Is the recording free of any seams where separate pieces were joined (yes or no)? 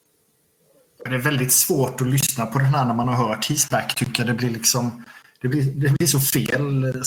yes